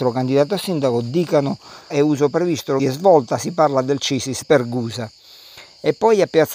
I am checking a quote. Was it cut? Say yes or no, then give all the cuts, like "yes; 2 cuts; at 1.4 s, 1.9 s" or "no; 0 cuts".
yes; 3 cuts; at 1.9 s, 2.8 s, 4.4 s